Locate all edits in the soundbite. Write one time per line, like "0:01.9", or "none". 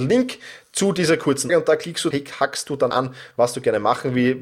0:01.5
0:02.1
0:02.9